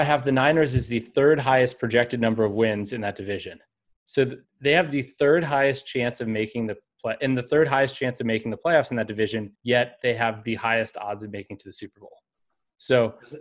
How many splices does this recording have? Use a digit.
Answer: 2